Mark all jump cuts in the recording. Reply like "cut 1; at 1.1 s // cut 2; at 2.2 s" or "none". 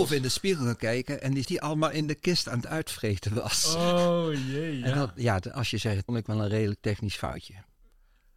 cut 1; at 1.4 s // cut 2; at 6.1 s

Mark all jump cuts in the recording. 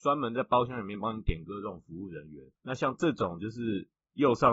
cut 1; at 2.6 s

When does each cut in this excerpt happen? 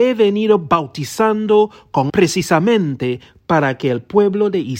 cut 1; at 2.1 s

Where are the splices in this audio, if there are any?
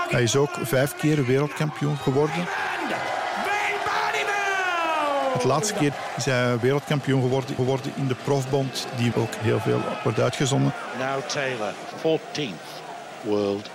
cut 1; at 7.6 s // cut 2; at 9.1 s // cut 3; at 11.9 s

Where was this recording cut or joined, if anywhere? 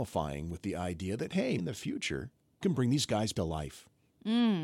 cut 1; at 1.6 s // cut 2; at 2.6 s // cut 3; at 3.3 s

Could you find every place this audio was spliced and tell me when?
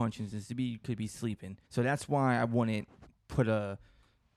cut 1; at 1.6 s

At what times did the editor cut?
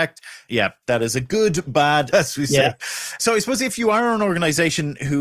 cut 1; at 2.1 s

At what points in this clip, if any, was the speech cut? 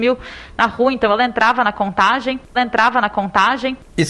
cut 1; at 2.5 s

